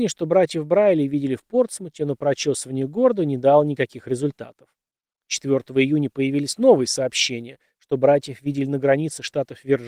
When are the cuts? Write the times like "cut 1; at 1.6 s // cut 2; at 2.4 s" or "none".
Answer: cut 1; at 5.0 s